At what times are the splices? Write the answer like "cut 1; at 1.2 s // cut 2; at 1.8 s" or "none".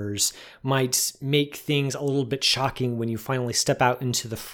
none